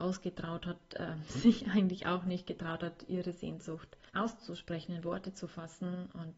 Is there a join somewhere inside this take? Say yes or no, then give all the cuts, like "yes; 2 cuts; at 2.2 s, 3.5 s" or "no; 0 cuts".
no; 0 cuts